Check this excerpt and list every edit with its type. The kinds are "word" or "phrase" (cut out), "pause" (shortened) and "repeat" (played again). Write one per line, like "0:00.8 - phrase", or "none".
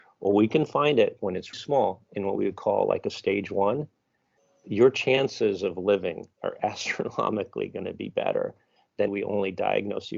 0:01.5 - word
0:06.3 - pause
0:09.1 - phrase